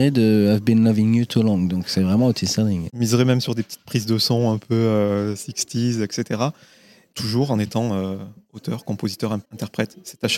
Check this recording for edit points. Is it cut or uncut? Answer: uncut